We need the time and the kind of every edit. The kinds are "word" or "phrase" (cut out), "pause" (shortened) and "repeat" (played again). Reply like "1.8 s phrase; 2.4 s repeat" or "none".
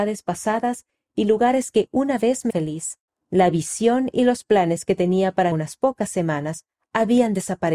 2.5 s word; 3.1 s pause; 5.5 s phrase